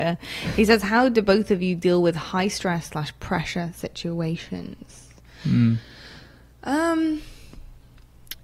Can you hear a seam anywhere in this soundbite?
no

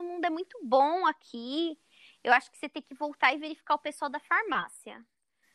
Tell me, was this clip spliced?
no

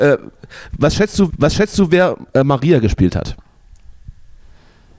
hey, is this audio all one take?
no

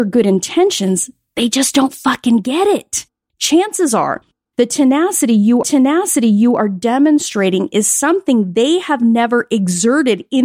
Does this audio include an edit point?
yes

